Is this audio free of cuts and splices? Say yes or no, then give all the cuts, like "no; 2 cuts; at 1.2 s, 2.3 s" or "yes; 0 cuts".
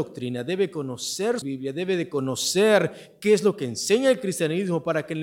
no; 1 cut; at 1.4 s